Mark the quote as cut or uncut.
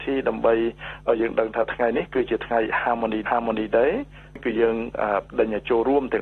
cut